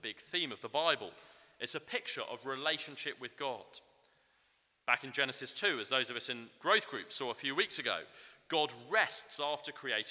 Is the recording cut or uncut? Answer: uncut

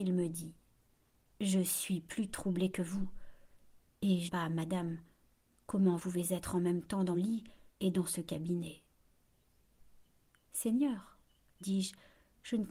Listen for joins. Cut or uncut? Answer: cut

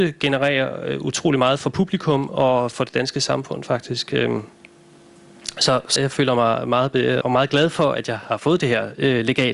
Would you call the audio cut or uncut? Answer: cut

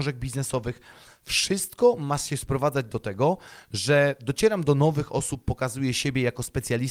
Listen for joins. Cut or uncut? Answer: uncut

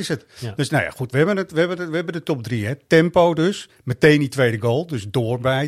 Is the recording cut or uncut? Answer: uncut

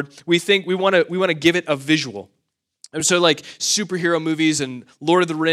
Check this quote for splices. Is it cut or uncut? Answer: uncut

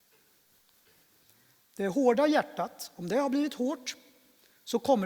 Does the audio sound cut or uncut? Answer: uncut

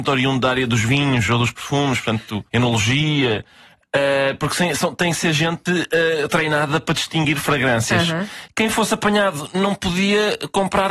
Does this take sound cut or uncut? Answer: cut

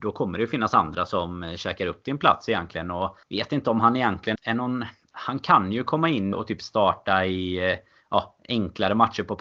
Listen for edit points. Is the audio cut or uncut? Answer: cut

